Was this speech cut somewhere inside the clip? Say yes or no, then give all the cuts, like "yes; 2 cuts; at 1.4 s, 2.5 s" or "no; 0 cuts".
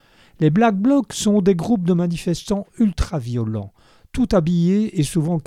no; 0 cuts